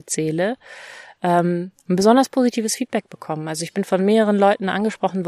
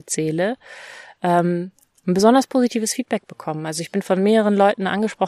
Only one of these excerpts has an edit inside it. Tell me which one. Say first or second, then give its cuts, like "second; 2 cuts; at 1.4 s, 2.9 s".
first; 1 cut; at 1.8 s